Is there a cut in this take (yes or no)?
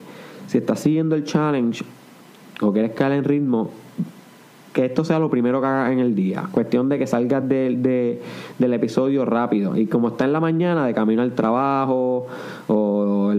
no